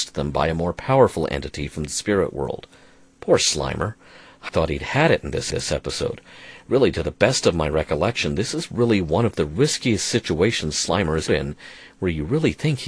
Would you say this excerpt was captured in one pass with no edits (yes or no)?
no